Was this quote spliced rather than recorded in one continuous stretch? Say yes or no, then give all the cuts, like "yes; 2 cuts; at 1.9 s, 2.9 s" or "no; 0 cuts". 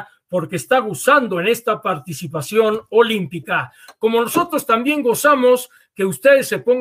no; 0 cuts